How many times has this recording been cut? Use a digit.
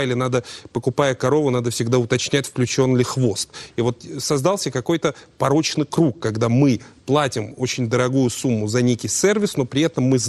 0